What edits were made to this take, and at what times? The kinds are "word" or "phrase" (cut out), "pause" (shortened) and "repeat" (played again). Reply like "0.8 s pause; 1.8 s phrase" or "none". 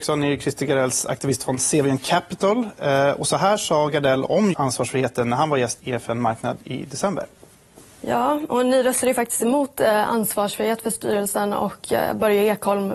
4.5 s word; 5.8 s word

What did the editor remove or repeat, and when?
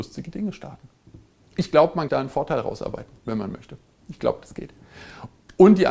2.1 s phrase

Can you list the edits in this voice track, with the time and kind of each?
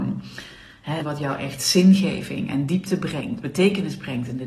1.0 s word

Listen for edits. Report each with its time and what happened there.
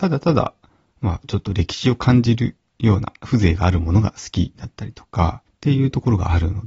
2.7 s pause; 5.5 s pause

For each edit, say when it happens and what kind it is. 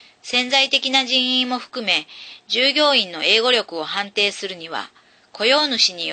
none

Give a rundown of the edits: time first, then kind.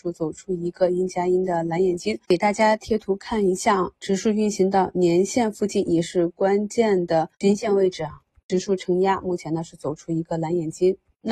2.2 s pause; 4.0 s pause; 7.3 s pause

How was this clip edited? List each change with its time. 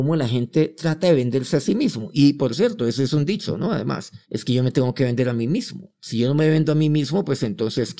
4.2 s pause

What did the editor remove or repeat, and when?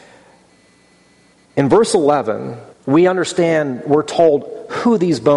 2.7 s pause

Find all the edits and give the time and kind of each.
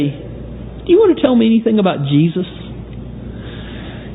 none

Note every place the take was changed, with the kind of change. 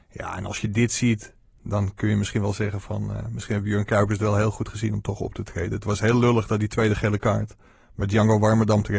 none

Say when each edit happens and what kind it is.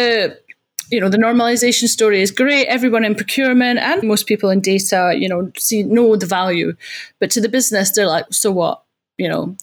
4.0 s word; 8.3 s word

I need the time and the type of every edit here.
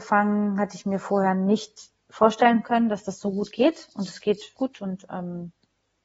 4.6 s word

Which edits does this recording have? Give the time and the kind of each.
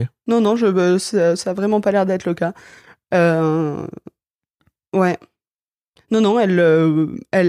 none

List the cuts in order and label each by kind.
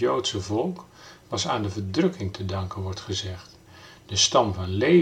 none

